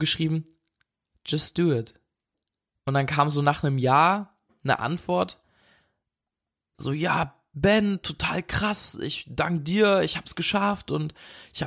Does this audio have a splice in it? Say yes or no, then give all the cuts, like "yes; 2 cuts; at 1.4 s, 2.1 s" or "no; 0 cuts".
yes; 1 cut; at 2.3 s